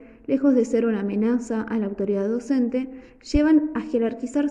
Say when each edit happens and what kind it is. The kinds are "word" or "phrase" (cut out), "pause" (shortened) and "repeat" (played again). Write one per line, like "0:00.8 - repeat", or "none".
none